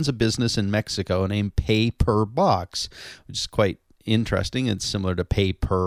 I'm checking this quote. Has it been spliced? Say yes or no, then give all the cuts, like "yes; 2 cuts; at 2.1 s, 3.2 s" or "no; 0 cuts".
no; 0 cuts